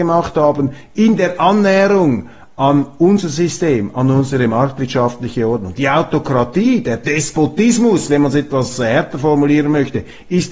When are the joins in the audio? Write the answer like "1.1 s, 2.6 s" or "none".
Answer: none